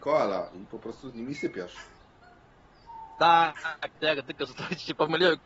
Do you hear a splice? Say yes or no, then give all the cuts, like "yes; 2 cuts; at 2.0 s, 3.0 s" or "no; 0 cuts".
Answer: yes; 1 cut; at 3.9 s